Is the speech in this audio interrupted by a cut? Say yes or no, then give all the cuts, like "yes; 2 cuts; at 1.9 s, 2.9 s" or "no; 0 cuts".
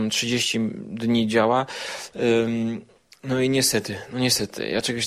no; 0 cuts